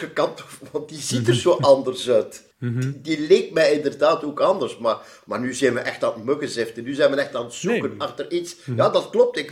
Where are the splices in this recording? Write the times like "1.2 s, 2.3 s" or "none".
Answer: 2.5 s